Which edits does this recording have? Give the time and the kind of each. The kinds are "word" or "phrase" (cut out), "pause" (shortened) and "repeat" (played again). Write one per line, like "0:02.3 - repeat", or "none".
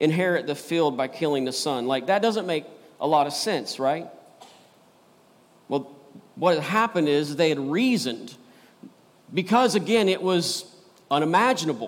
none